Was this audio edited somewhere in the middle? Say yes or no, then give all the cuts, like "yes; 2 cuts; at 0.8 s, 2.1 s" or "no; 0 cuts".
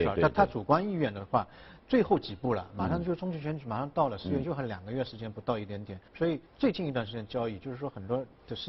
yes; 2 cuts; at 6.1 s, 6.5 s